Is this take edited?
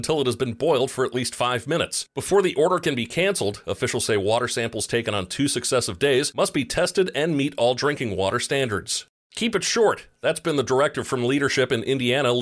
no; 0 cuts

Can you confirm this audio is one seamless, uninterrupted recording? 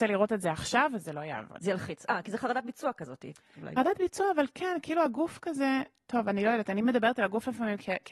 yes; 0 cuts

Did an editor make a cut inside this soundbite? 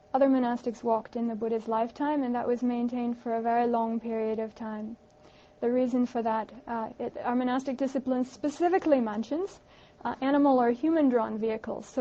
no; 0 cuts

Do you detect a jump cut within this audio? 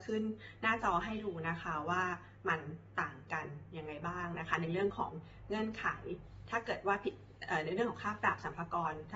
no; 0 cuts

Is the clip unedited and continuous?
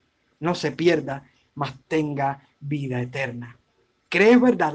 yes; 0 cuts

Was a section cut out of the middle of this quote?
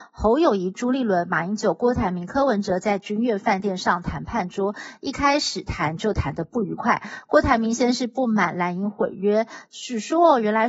no; 0 cuts

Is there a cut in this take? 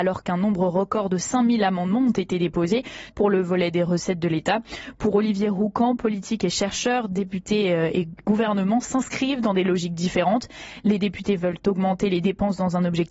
yes; 2 cuts; at 3.1 s, 8.2 s

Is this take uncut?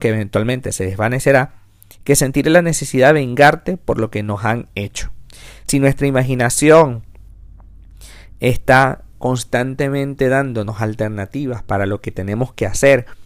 yes; 0 cuts

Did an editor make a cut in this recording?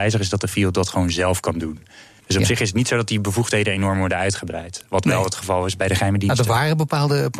yes; 1 cut; at 5.8 s

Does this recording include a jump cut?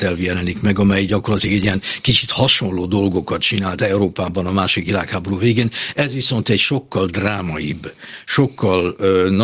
no; 0 cuts

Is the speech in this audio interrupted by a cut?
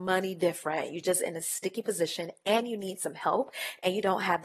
no; 0 cuts

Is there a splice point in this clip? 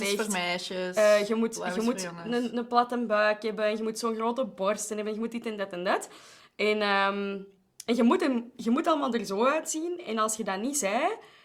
no; 0 cuts

